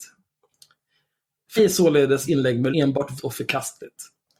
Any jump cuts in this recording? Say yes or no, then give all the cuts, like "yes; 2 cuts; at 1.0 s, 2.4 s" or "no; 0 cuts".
yes; 4 cuts; at 1.6 s, 2.3 s, 2.7 s, 3.2 s